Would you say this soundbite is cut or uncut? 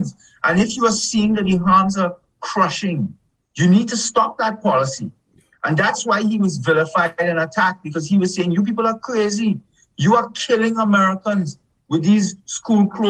uncut